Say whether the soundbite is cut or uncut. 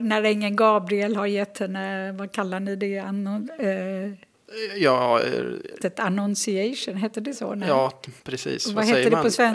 cut